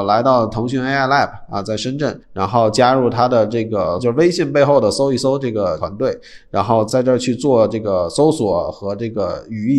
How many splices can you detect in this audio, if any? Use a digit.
1